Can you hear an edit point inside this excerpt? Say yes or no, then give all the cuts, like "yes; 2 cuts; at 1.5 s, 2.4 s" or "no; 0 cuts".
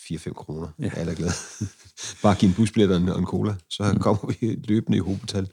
no; 0 cuts